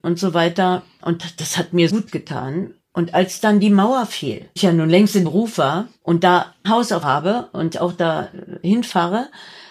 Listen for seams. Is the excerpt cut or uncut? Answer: cut